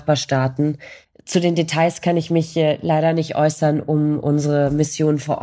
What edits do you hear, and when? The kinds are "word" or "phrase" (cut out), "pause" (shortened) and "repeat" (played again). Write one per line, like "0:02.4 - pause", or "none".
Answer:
none